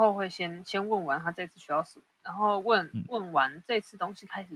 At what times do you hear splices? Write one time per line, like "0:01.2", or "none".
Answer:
0:02.1